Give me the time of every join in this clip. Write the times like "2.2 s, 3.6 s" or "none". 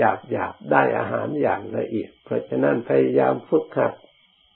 2.2 s